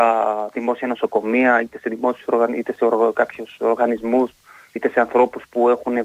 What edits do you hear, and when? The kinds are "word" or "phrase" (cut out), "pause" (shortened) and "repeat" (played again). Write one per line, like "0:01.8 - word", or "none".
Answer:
0:04.8 - word